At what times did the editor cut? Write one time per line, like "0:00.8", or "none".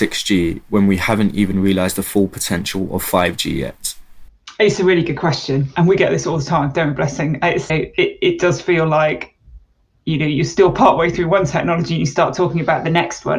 0:07.7